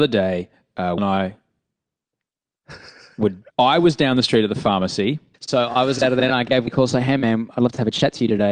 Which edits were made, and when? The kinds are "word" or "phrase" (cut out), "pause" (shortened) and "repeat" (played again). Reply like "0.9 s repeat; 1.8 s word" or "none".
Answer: 1.0 s word; 3.5 s pause; 6.7 s word